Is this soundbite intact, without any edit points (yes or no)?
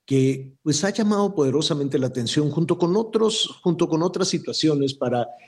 yes